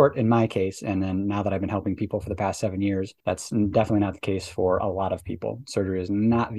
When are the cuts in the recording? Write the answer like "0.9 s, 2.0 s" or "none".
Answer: 3.2 s